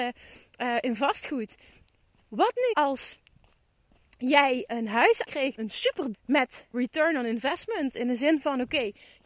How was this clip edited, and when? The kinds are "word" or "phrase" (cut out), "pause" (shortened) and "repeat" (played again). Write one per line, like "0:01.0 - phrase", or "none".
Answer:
0:02.7 - word
0:04.7 - word
0:05.2 - word
0:05.6 - word
0:06.1 - word
0:06.7 - word

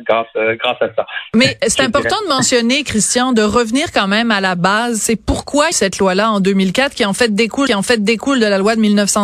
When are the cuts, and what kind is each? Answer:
0:05.7 - phrase
0:07.7 - repeat

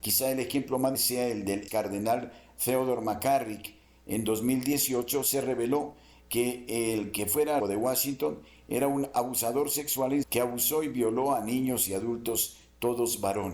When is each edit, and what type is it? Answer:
0:00.9 - word
0:01.7 - word
0:07.6 - word
0:10.2 - word

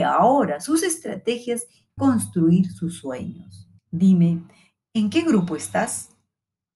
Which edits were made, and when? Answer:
0:02.0 - phrase
0:03.8 - pause

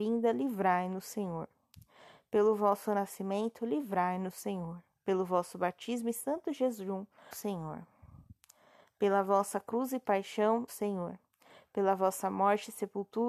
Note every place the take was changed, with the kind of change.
0:07.3 - word
0:10.7 - word

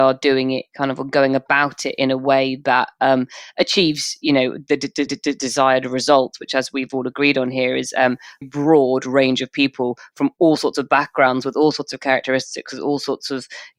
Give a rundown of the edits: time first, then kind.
0:05.1 - repeat
0:08.4 - word

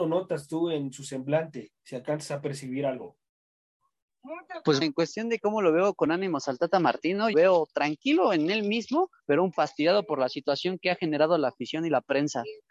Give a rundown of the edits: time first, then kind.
0:01.8 - pause
0:04.8 - word
0:07.3 - phrase
0:09.2 - pause
0:09.5 - word

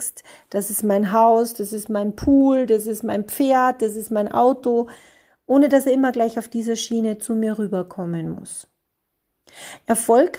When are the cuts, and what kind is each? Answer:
none

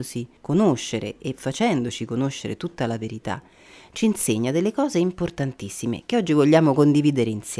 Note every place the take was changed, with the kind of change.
none

